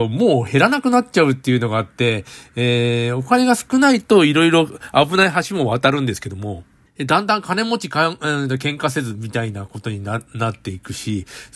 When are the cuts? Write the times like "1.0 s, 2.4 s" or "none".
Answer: 6.9 s